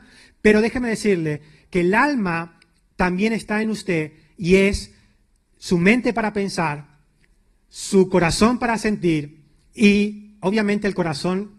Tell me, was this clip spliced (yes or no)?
no